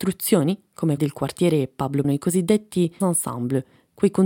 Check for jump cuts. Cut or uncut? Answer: cut